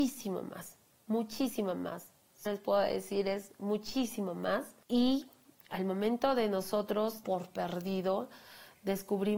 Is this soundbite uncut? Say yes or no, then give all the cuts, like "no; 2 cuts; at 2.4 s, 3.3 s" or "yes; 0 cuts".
no; 3 cuts; at 2.5 s, 4.8 s, 7.2 s